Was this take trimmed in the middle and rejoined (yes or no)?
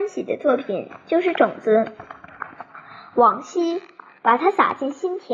no